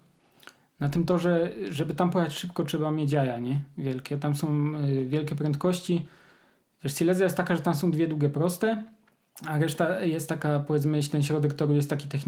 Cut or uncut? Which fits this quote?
uncut